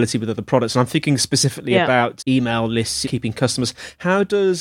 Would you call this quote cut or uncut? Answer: cut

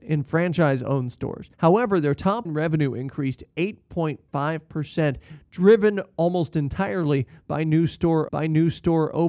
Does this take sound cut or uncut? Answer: cut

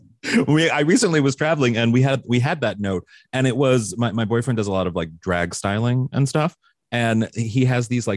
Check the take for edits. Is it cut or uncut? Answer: uncut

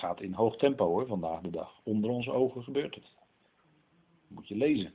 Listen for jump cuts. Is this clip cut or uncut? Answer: uncut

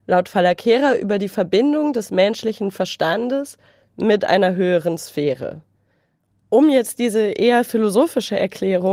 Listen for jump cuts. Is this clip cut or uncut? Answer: uncut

